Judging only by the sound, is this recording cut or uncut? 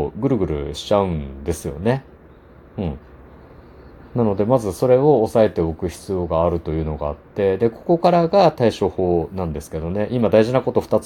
uncut